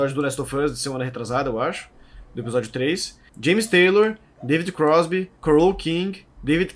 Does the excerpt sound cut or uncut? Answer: cut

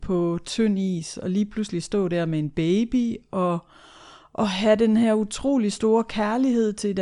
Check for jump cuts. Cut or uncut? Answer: uncut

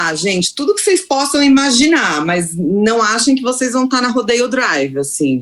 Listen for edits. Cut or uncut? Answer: uncut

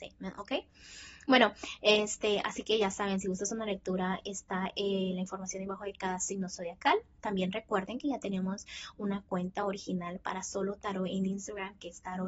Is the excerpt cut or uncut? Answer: uncut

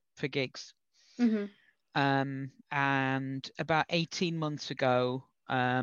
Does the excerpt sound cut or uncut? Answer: cut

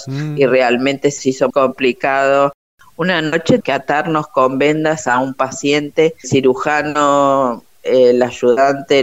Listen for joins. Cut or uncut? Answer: cut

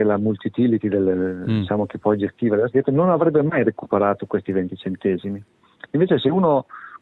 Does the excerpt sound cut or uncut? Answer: uncut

